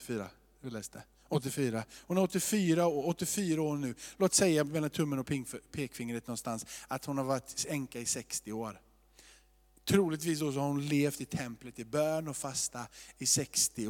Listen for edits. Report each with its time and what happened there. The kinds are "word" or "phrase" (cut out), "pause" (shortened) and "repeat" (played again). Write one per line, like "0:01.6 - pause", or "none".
none